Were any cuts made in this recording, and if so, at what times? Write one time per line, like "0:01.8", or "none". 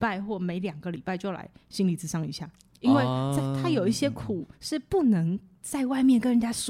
0:02.7